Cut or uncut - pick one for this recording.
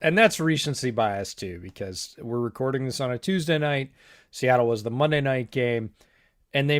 uncut